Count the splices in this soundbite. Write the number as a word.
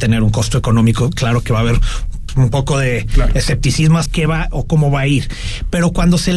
two